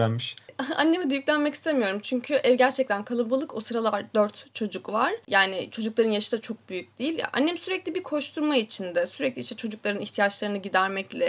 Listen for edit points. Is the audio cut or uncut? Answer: uncut